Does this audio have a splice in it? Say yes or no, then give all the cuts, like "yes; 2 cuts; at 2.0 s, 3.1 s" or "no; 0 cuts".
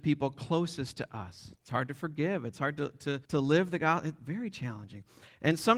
yes; 2 cuts; at 1.6 s, 3.2 s